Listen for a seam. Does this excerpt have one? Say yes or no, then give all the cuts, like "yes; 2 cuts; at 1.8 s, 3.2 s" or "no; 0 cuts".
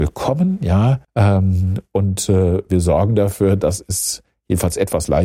yes; 1 cut; at 1.0 s